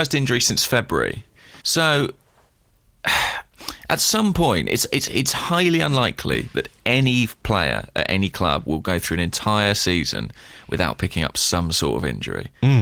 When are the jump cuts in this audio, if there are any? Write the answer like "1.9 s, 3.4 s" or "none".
1.6 s